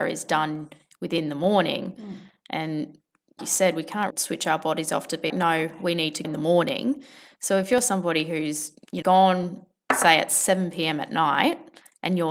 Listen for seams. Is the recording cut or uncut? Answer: cut